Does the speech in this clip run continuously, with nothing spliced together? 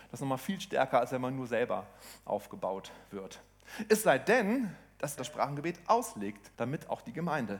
no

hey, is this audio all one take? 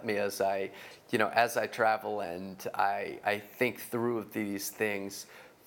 yes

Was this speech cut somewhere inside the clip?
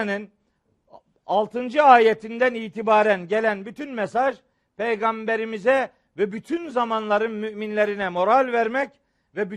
no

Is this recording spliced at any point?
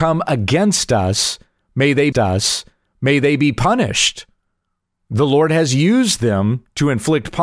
yes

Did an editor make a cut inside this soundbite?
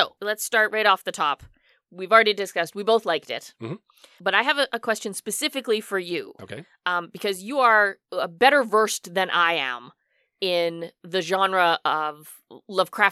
no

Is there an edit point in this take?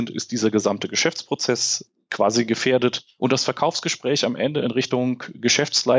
no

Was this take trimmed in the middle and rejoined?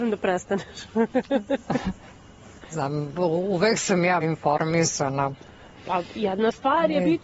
yes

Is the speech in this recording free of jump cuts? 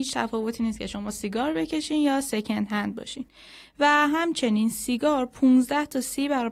yes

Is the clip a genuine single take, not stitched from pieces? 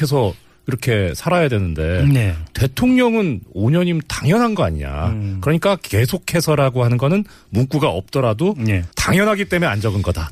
no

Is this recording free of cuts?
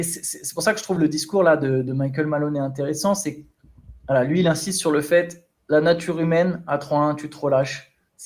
yes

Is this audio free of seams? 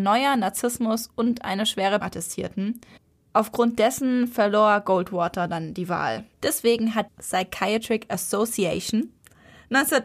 no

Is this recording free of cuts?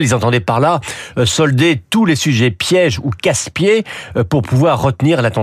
yes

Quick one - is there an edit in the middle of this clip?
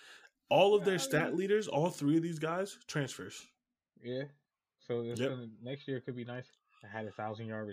no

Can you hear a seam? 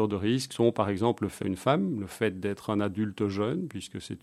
yes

